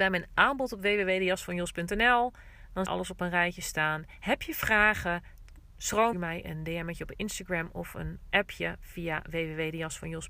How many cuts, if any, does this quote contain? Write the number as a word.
two